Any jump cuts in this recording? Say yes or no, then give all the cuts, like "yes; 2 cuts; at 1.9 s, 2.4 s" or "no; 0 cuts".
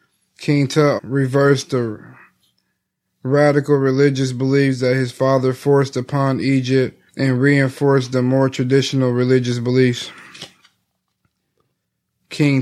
yes; 2 cuts; at 1.0 s, 7.1 s